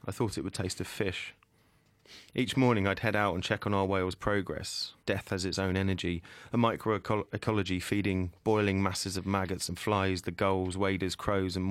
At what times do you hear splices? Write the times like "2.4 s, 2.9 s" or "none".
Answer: 2.3 s, 5.0 s